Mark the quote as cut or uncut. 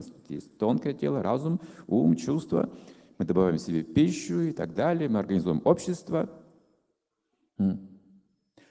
uncut